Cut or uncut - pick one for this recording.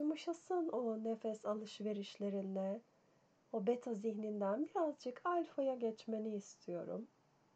uncut